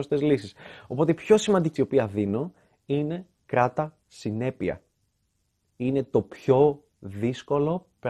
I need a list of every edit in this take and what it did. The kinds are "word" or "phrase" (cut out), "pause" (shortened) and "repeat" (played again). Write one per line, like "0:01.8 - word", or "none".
0:01.8 - word